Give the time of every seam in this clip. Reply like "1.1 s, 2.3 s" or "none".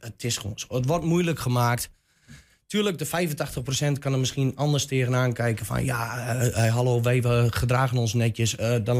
none

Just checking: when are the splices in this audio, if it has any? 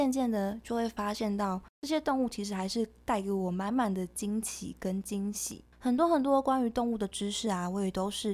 5.7 s

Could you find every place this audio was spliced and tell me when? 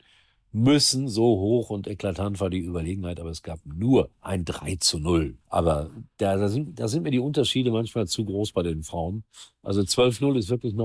4.1 s, 5.4 s

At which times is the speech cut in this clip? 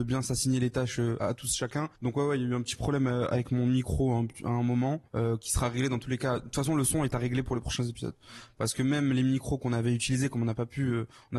1.2 s, 1.9 s, 5.1 s

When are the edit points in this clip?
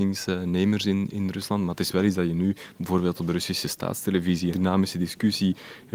4.5 s

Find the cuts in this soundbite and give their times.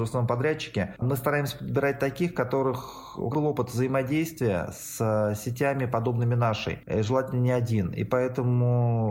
3.3 s

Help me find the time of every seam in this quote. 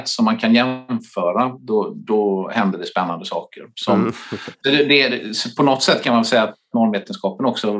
none

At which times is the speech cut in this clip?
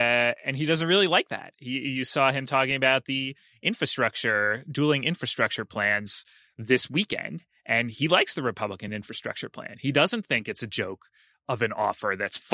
none

